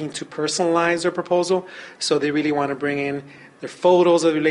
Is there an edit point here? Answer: no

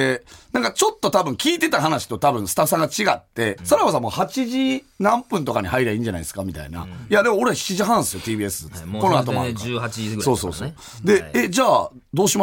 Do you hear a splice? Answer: yes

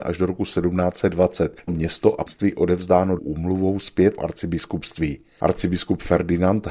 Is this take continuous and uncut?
no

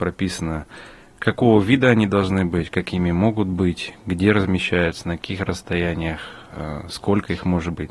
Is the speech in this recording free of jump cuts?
yes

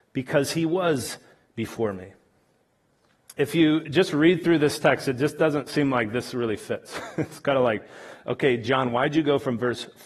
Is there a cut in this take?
no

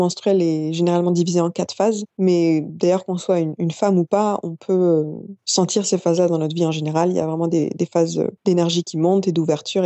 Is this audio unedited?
no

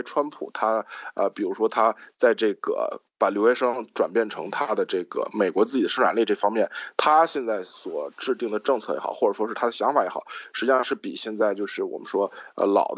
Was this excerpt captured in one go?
yes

